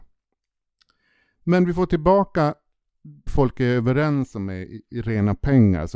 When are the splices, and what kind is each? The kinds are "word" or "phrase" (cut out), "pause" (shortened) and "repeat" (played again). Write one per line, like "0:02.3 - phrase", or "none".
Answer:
0:03.3 - word